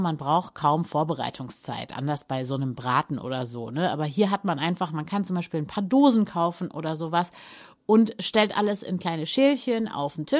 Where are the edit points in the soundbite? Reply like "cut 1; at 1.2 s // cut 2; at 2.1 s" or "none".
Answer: none